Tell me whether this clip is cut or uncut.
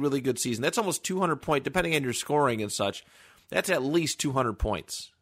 uncut